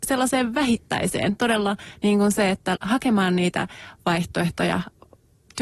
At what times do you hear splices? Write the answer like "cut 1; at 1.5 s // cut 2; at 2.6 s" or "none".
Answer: cut 1; at 2.8 s